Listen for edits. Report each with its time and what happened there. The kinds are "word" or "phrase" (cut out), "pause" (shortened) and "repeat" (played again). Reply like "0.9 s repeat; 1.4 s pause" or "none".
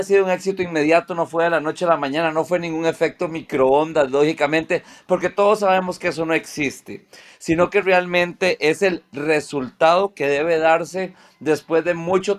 none